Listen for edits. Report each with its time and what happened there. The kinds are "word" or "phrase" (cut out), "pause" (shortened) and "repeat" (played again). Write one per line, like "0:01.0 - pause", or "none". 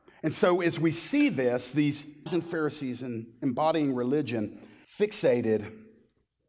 0:02.3 - word
0:04.8 - pause